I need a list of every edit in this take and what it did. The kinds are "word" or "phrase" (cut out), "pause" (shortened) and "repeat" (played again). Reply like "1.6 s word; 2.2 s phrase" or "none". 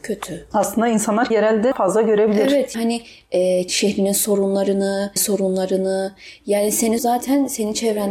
1.3 s word; 1.7 s word; 2.7 s word; 3.7 s word; 5.2 s word; 7.0 s word